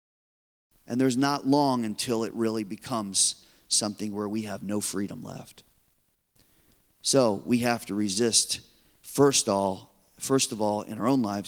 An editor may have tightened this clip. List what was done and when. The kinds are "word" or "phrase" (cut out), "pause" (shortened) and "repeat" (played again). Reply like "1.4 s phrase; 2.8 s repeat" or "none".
none